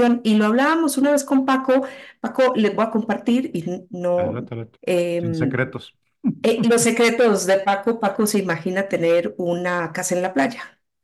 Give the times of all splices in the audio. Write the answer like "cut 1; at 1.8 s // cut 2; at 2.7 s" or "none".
cut 1; at 4.7 s